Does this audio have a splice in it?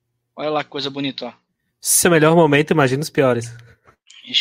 yes; 1 cut; at 2.0 s

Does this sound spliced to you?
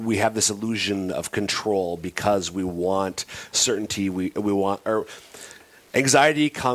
no; 0 cuts

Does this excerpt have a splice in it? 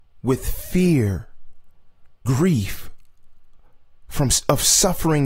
yes; 1 cut; at 2.3 s

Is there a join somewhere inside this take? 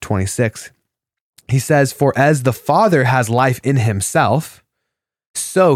no; 0 cuts

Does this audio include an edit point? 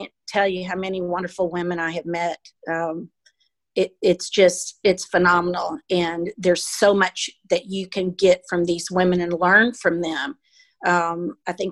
no; 0 cuts

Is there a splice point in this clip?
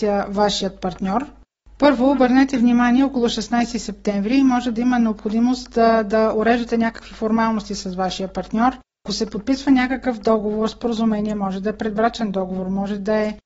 no; 0 cuts

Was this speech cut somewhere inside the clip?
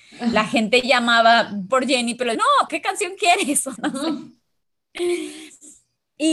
yes; 4 cuts; at 1.7 s, 2.3 s, 2.7 s, 3.8 s

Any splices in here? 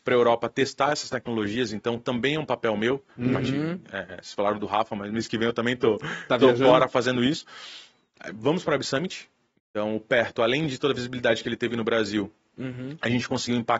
no; 0 cuts

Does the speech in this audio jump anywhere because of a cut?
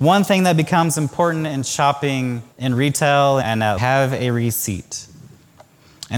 yes; 3 cuts; at 2.5 s, 3.4 s, 3.8 s

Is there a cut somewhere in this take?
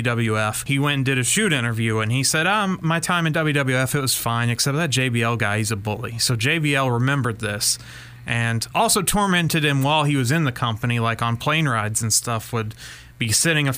no; 0 cuts

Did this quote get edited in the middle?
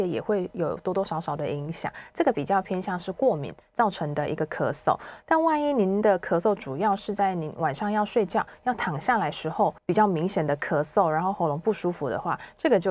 yes; 1 cut; at 9.8 s

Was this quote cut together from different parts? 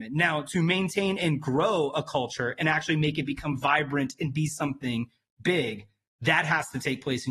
no; 0 cuts

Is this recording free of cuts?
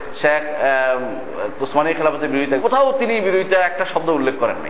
no; 1 cut; at 2.6 s

